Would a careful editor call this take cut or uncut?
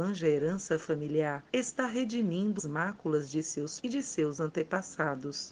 cut